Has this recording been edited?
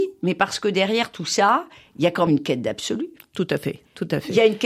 yes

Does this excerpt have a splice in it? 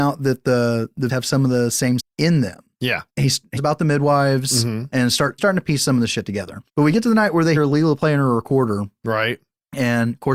yes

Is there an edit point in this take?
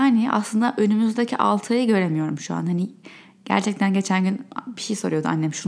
no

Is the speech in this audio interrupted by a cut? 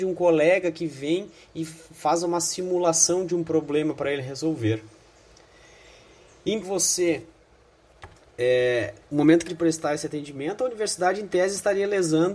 yes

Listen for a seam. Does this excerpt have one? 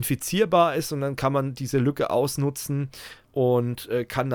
yes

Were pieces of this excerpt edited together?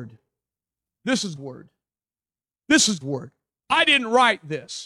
yes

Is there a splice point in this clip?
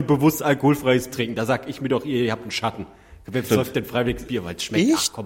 yes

